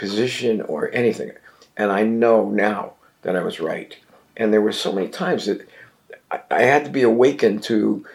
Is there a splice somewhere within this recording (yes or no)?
no